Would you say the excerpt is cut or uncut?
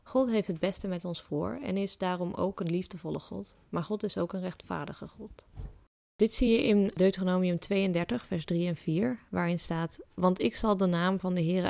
uncut